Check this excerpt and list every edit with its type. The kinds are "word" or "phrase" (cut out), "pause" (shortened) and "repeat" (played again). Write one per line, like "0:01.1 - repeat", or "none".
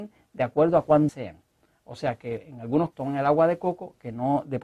0:01.1 - word
0:02.9 - word

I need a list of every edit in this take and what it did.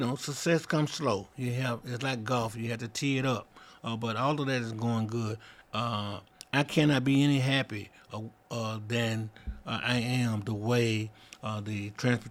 none

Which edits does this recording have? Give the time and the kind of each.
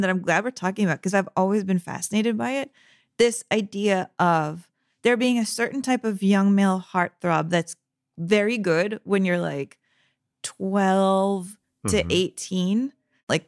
none

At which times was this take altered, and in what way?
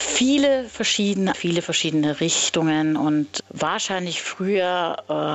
0:01.3 - word
0:03.4 - word

